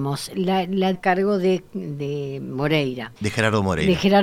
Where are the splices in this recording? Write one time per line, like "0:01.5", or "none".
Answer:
0:00.9
0:03.2